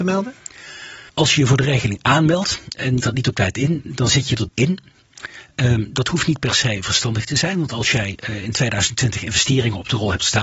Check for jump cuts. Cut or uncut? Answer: cut